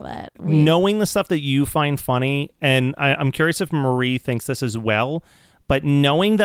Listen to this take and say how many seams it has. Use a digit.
0